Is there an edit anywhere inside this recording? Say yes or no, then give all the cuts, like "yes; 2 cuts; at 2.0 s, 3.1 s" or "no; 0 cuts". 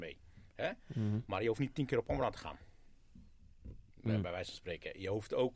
yes; 1 cut; at 3.9 s